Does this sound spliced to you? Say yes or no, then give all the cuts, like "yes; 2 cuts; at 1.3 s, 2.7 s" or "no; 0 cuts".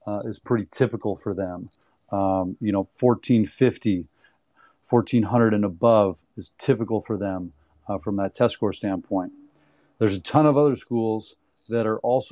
no; 0 cuts